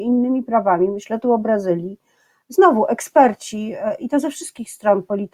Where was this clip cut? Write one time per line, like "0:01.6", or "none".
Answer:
none